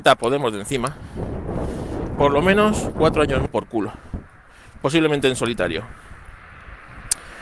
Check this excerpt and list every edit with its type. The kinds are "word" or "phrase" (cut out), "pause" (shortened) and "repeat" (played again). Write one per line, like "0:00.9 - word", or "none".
0:02.2 - word
0:03.5 - phrase